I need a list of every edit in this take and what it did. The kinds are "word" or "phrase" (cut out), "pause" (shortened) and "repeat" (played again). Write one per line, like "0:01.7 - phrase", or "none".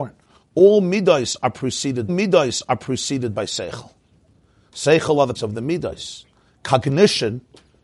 0:02.1 - repeat
0:05.3 - word